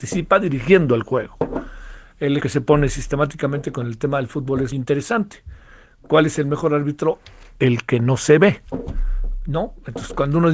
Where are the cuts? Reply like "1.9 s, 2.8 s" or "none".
2.4 s, 4.7 s